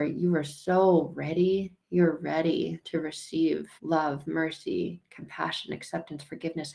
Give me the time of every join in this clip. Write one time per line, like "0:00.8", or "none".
0:03.8